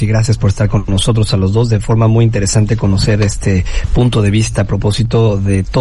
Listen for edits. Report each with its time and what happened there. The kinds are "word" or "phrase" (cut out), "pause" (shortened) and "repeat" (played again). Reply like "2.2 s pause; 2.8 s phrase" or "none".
none